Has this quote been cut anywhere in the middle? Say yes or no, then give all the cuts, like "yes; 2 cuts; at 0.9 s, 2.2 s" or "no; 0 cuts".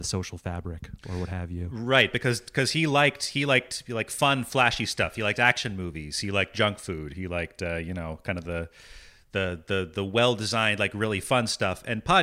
no; 0 cuts